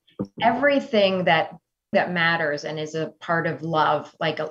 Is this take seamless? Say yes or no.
no